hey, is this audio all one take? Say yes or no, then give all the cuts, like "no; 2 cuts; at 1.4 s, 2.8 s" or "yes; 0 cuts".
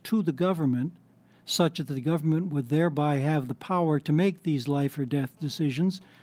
yes; 0 cuts